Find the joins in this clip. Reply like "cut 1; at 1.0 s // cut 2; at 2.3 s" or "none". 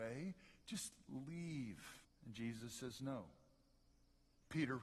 cut 1; at 2.0 s